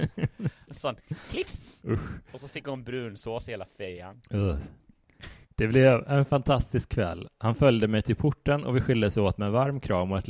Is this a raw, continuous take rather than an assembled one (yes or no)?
no